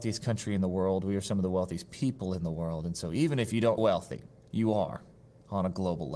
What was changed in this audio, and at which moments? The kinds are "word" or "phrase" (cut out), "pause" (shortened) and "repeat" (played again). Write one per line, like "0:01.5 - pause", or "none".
0:03.8 - word
0:04.4 - pause